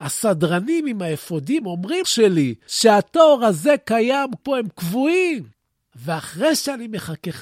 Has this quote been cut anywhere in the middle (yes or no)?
yes